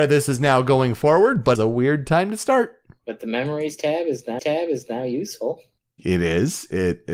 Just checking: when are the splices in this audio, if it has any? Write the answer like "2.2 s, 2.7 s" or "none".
1.5 s, 4.4 s